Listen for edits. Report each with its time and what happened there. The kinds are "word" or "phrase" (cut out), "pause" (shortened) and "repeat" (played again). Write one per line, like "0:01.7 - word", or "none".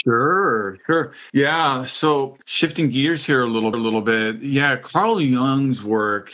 0:01.3 - pause
0:02.4 - pause
0:03.7 - repeat